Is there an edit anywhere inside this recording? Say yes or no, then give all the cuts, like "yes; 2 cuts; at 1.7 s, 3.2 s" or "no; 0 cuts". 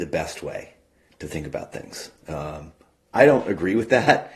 no; 0 cuts